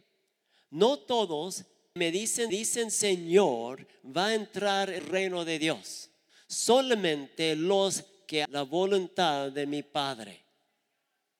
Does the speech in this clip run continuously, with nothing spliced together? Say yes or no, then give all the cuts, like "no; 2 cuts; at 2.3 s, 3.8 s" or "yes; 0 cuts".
no; 5 cuts; at 2.0 s, 2.5 s, 5.0 s, 6.3 s, 8.4 s